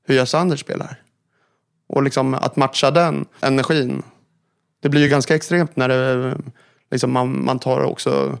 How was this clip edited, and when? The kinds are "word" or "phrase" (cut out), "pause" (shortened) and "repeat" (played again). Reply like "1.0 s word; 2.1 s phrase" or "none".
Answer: none